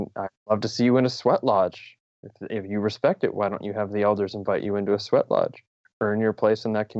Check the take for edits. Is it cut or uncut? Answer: uncut